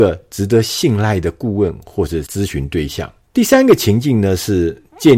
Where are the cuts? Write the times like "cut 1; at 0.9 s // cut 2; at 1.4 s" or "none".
cut 1; at 3.2 s

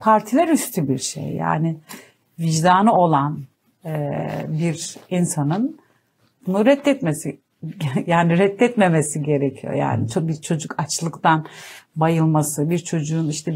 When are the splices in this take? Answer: none

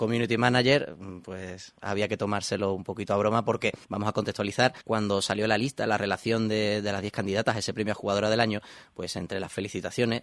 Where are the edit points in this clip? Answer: cut 1; at 1.8 s // cut 2; at 3.8 s // cut 3; at 4.8 s

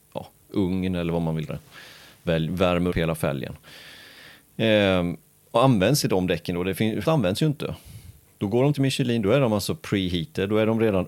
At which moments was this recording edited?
cut 1; at 1.5 s // cut 2; at 2.3 s // cut 3; at 2.9 s // cut 4; at 6.0 s // cut 5; at 7.0 s // cut 6; at 8.7 s

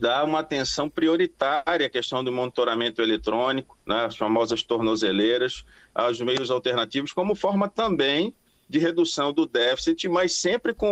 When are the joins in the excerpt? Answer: none

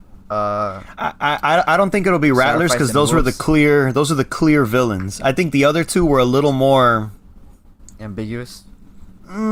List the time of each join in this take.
cut 1; at 1.0 s

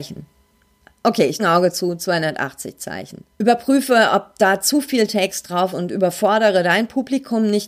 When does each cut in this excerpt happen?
cut 1; at 1.4 s // cut 2; at 3.3 s // cut 3; at 5.7 s

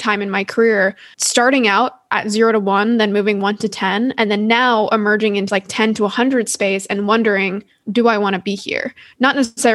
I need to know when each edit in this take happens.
cut 1; at 5.5 s

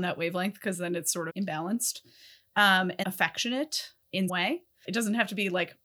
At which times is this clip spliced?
cut 1; at 1.3 s // cut 2; at 3.0 s // cut 3; at 4.3 s

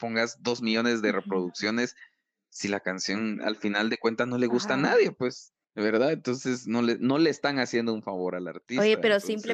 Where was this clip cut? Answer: none

